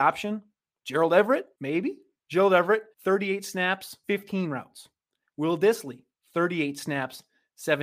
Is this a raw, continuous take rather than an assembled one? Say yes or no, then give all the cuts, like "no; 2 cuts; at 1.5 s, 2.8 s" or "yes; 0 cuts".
no; 1 cut; at 2.9 s